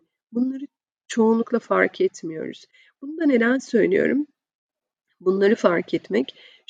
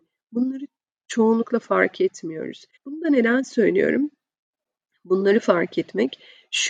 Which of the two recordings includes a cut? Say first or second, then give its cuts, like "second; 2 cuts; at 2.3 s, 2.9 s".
second; 1 cut; at 2.8 s